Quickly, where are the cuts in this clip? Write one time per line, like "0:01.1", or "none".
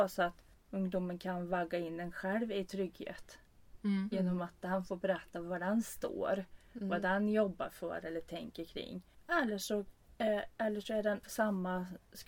0:11.2